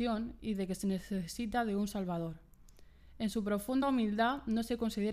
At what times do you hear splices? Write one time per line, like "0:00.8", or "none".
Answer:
none